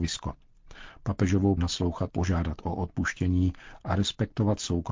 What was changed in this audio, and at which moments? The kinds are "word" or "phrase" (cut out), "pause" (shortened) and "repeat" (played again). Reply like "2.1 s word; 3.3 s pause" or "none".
1.6 s phrase; 2.1 s word